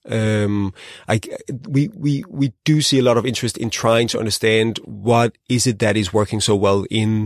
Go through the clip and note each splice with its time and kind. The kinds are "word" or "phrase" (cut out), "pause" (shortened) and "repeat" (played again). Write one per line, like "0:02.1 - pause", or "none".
none